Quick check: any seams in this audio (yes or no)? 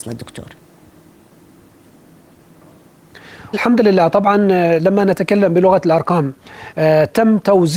yes